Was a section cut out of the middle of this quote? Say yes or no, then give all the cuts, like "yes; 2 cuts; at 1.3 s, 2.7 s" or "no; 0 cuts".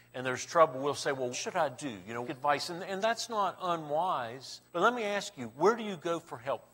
yes; 3 cuts; at 1.3 s, 2.2 s, 4.7 s